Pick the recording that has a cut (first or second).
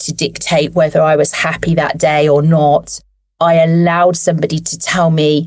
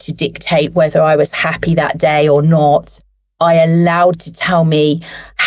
second